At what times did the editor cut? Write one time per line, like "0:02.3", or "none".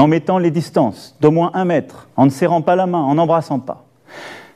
0:02.1